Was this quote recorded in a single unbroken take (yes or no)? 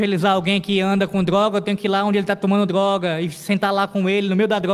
yes